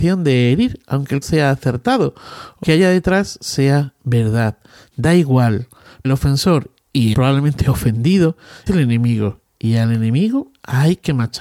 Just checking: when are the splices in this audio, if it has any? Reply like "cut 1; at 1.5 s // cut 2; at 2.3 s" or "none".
cut 1; at 1.2 s // cut 2; at 2.6 s // cut 3; at 6.0 s // cut 4; at 7.1 s // cut 5; at 8.7 s